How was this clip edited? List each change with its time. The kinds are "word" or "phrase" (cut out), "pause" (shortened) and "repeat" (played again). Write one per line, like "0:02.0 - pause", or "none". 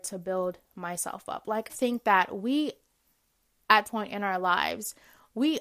0:01.7 - word
0:03.8 - word